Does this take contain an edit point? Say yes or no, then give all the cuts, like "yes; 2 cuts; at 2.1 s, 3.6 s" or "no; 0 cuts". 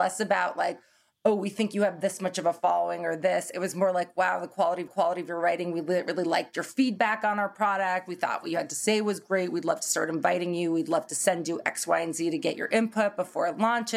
yes; 1 cut; at 4.9 s